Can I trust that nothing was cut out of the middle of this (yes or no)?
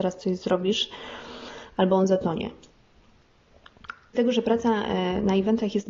no